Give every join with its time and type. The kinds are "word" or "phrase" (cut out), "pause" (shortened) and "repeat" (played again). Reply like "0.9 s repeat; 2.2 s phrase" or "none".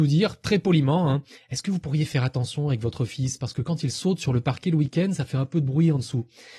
none